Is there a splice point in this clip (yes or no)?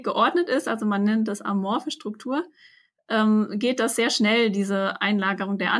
no